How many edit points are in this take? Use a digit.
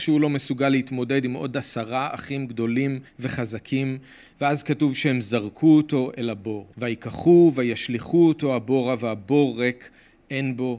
2